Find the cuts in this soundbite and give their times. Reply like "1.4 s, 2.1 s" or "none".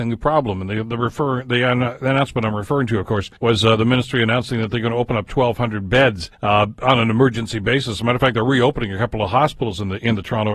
3.4 s, 6.3 s